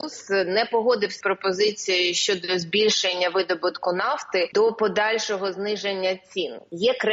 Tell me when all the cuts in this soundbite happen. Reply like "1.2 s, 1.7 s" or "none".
1.2 s, 4.5 s